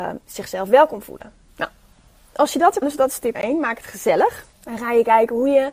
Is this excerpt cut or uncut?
cut